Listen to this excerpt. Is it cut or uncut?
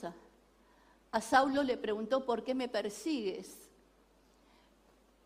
uncut